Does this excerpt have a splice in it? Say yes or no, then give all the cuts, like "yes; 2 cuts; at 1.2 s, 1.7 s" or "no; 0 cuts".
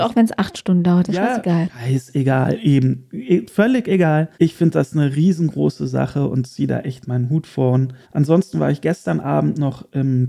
yes; 2 cuts; at 4.3 s, 8.0 s